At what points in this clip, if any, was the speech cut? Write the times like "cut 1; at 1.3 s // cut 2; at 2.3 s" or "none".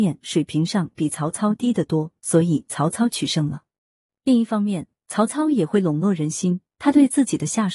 none